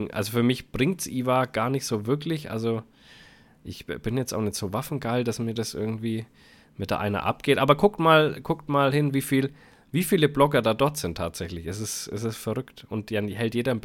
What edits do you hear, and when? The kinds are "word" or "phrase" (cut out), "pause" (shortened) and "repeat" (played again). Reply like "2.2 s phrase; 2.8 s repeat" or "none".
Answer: none